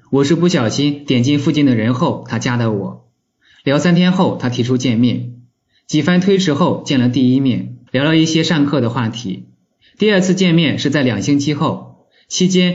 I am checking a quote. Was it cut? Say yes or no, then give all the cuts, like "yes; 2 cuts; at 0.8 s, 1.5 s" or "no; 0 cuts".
yes; 1 cut; at 7.9 s